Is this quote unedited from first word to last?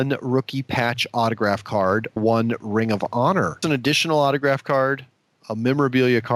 no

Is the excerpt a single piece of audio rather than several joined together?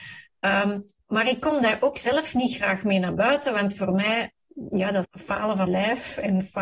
no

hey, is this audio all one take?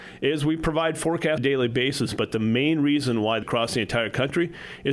no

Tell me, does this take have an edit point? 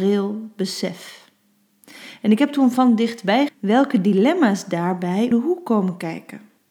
yes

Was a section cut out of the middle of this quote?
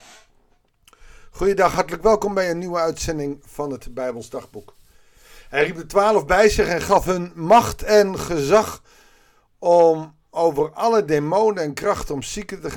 no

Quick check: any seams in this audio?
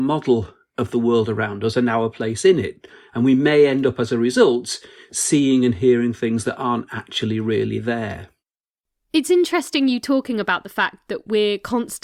no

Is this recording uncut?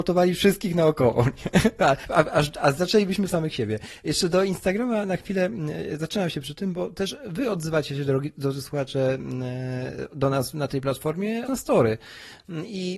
no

